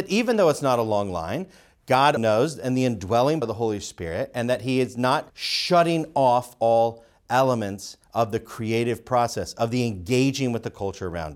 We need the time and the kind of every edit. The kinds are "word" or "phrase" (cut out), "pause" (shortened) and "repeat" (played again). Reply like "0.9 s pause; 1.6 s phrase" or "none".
2.2 s word; 3.4 s word; 5.3 s pause; 8.0 s pause